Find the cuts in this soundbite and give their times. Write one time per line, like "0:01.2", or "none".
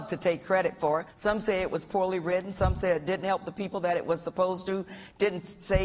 0:01.1